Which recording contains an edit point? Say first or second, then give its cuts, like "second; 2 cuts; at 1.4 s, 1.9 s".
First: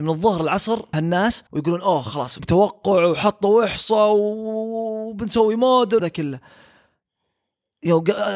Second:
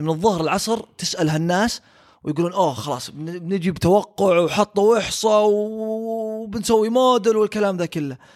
first; 4 cuts; at 0.9 s, 1.5 s, 2.4 s, 6.0 s